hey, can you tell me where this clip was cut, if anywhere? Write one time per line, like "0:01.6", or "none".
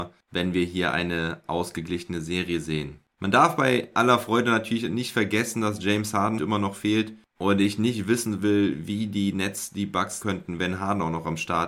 0:06.4
0:10.2